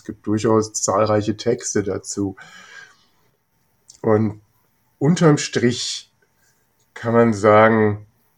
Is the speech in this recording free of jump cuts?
yes; 0 cuts

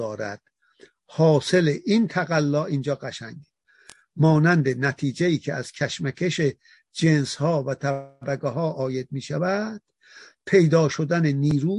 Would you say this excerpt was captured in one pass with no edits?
yes; 0 cuts

